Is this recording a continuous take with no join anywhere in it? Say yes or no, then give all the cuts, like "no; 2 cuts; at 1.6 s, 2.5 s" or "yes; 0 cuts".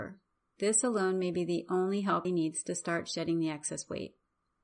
no; 1 cut; at 2.2 s